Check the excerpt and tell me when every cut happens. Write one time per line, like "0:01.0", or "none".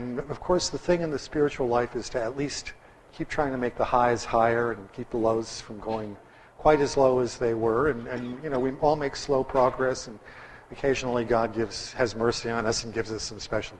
none